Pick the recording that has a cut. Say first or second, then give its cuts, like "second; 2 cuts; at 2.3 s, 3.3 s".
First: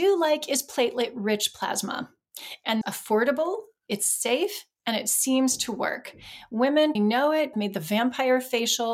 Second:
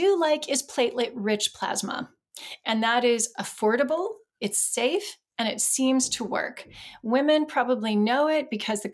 first; 3 cuts; at 2.8 s, 7.0 s, 7.5 s